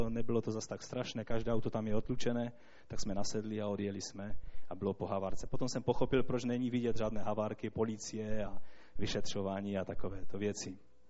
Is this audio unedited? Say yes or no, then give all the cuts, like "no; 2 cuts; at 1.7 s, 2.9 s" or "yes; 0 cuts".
yes; 0 cuts